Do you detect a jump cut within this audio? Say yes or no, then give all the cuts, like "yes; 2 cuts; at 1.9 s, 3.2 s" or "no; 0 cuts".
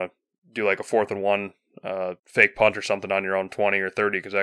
yes; 1 cut; at 2.2 s